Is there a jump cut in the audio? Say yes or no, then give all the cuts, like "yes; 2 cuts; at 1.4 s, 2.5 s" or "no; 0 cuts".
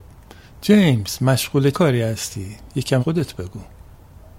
yes; 2 cuts; at 1.7 s, 3.0 s